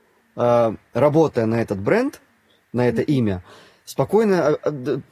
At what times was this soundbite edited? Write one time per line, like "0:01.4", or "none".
none